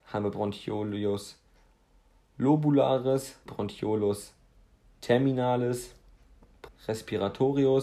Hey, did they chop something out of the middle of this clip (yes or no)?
yes